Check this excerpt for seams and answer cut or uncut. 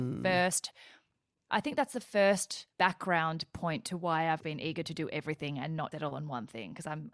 cut